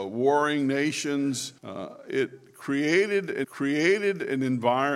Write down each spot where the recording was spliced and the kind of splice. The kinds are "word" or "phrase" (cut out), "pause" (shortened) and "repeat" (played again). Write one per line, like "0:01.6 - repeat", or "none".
0:01.6 - pause
0:03.4 - repeat

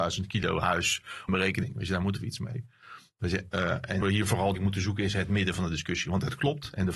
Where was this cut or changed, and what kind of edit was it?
0:01.3 - phrase
0:03.5 - word
0:04.0 - phrase
0:04.6 - word

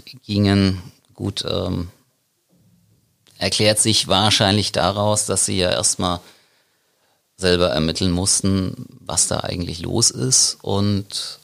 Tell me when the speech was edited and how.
none

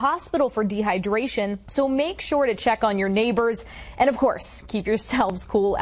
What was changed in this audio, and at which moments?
none

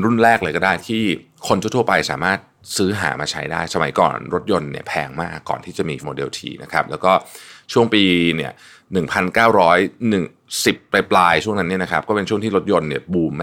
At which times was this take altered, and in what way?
0:06.0 - word

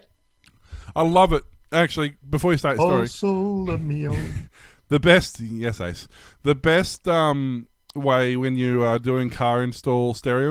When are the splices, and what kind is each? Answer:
none

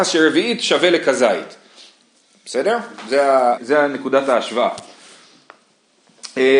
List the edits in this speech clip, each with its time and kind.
0:03.6 - word

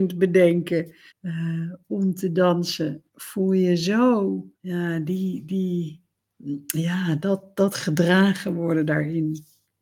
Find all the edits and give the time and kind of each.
0:01.1 - pause
0:03.1 - pause
0:04.5 - pause

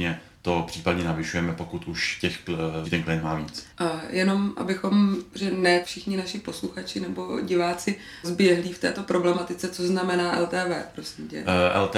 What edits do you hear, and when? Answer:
0:02.8 - word
0:03.7 - pause
0:05.8 - word
0:08.2 - word

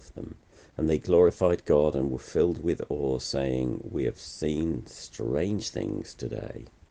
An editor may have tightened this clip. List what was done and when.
none

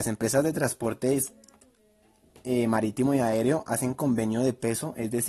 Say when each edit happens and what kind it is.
none

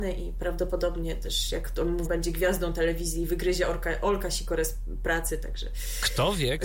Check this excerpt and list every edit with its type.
0:02.0 - word

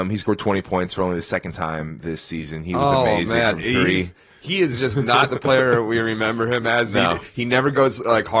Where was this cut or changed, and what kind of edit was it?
none

